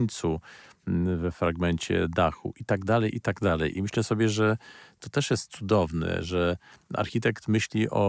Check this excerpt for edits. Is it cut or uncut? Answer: uncut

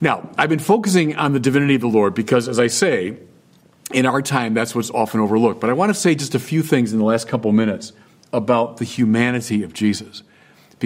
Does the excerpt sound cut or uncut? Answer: uncut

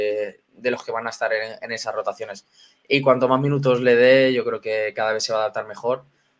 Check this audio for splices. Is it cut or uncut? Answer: uncut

